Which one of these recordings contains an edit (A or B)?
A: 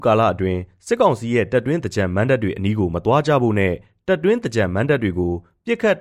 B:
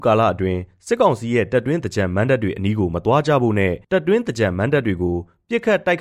B